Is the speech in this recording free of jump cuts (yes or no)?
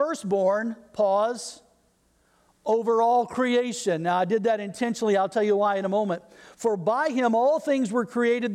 yes